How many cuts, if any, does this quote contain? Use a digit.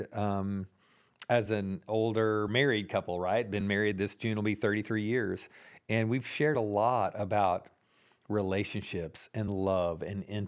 0